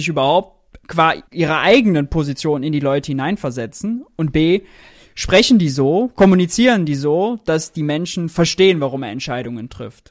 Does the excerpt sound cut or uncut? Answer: cut